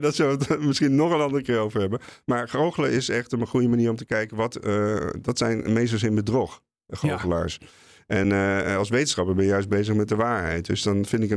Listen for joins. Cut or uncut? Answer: uncut